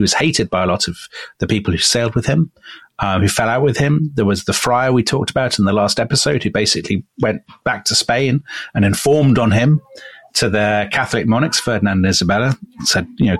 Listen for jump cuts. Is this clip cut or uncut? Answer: uncut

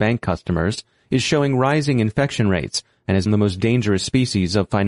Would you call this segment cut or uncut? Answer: cut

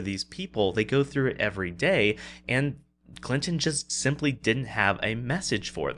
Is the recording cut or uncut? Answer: uncut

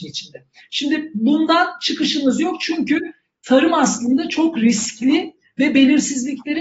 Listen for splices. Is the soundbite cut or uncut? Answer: uncut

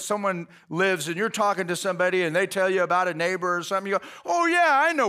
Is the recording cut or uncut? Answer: uncut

